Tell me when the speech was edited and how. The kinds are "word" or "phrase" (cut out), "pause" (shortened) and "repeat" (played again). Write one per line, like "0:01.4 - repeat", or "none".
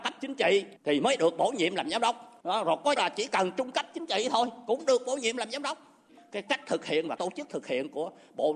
0:03.0 - word
0:07.2 - word